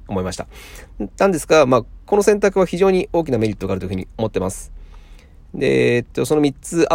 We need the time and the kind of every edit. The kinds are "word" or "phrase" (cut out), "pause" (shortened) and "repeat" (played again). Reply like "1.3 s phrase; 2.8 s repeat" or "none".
none